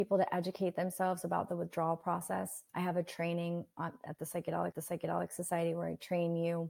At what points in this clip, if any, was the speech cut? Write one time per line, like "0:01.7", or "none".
0:02.7
0:04.7